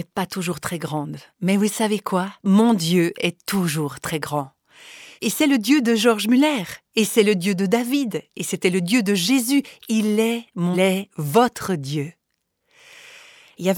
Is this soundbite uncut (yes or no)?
no